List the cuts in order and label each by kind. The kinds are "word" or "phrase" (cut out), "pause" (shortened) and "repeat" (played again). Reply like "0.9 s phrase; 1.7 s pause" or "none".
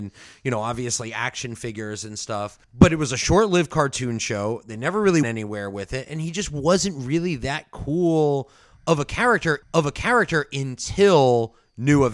2.6 s pause; 5.2 s word; 9.6 s repeat